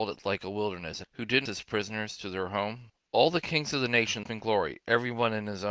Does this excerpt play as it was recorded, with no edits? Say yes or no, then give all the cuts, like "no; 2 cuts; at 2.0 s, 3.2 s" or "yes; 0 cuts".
no; 3 cuts; at 1.0 s, 1.5 s, 4.2 s